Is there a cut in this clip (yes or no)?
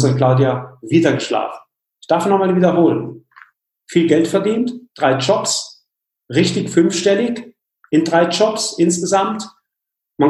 no